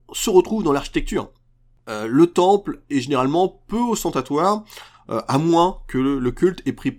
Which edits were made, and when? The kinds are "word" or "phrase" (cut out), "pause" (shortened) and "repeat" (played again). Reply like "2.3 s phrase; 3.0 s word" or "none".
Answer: none